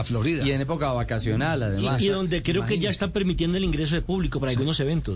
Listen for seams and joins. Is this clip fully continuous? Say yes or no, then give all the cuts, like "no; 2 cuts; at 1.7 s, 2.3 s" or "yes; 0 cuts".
yes; 0 cuts